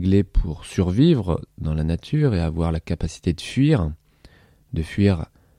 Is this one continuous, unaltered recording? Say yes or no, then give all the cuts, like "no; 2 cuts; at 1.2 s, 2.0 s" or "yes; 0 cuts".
yes; 0 cuts